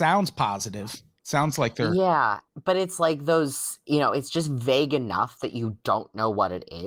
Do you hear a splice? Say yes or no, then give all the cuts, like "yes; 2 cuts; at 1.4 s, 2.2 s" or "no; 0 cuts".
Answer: no; 0 cuts